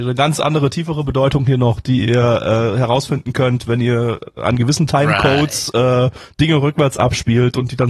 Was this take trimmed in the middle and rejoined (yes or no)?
no